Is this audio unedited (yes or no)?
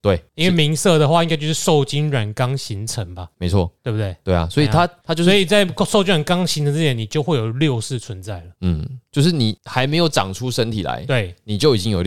yes